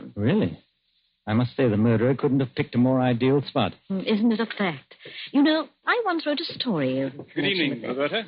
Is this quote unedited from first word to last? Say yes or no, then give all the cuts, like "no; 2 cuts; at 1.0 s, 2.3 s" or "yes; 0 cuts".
yes; 0 cuts